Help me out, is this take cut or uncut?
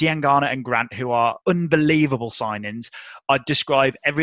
cut